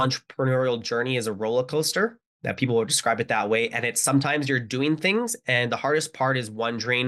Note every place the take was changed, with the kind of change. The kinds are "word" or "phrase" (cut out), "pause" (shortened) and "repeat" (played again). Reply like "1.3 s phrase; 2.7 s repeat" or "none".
none